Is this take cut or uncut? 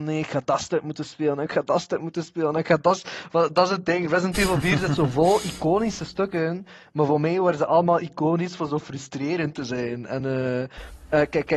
uncut